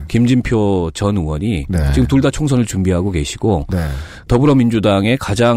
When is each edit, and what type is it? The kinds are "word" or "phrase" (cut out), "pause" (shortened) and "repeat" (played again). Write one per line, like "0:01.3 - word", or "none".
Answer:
none